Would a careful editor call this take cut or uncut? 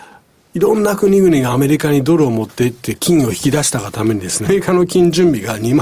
cut